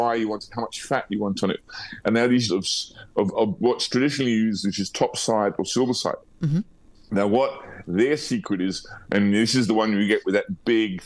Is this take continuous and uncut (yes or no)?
no